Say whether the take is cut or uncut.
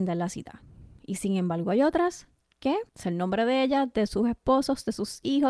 cut